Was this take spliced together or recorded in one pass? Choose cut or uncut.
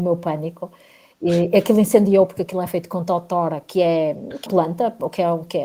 cut